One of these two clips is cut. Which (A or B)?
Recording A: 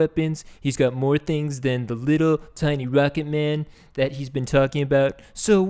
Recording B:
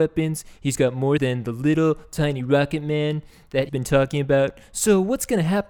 B